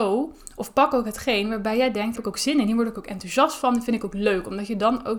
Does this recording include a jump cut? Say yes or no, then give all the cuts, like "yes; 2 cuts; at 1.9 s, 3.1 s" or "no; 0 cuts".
yes; 1 cut; at 2.2 s